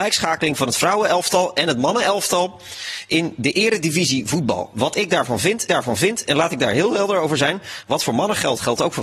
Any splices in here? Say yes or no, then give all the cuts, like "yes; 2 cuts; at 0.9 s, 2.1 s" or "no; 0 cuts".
yes; 1 cut; at 5.7 s